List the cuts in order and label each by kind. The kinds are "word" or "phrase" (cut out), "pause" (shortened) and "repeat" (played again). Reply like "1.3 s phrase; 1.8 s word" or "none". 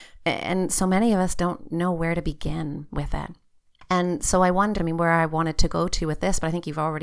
4.8 s word